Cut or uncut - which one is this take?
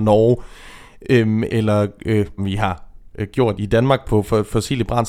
cut